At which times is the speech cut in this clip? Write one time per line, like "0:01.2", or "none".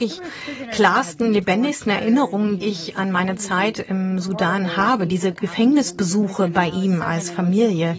0:02.6

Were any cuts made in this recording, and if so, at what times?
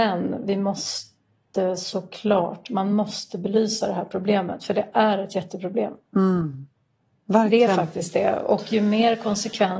none

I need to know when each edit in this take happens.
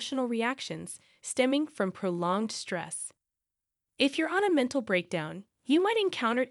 none

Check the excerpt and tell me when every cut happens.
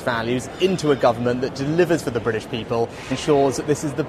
0:03.1

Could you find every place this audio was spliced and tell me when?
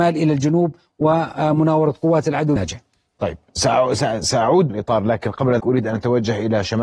0:02.6
0:04.7
0:05.6

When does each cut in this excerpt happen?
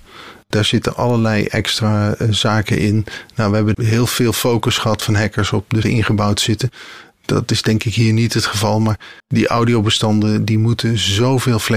0:05.8
0:09.2

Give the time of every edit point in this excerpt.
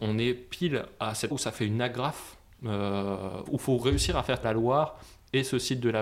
0:01.3
0:03.5
0:04.4

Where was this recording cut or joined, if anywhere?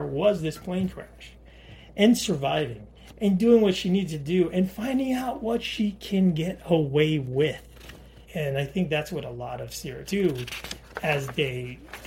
0:08.3
0:10.1

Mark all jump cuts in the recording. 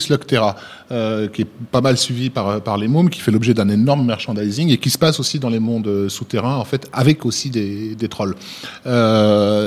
none

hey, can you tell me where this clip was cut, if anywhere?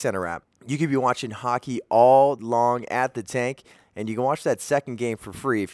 0:02.4

